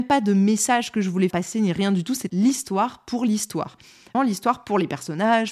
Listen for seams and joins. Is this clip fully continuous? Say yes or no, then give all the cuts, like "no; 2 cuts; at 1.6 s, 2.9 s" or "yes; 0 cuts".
no; 3 cuts; at 1.3 s, 2.3 s, 4.1 s